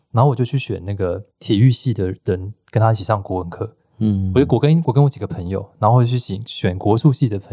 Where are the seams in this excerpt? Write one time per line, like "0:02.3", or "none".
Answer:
0:01.3
0:02.2